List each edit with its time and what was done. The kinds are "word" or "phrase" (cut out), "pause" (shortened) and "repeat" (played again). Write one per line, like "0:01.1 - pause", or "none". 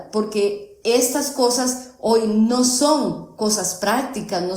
none